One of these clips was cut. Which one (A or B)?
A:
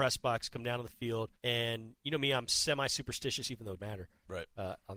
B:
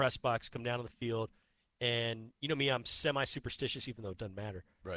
A